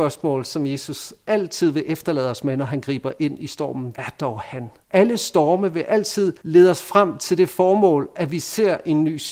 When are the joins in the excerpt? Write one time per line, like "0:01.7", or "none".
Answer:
0:03.9
0:04.8
0:06.4